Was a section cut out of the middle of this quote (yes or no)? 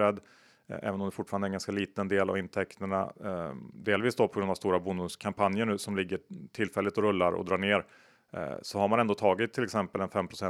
no